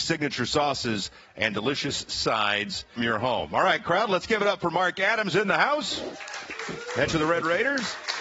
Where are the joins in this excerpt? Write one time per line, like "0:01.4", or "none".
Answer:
0:03.0
0:05.3
0:07.1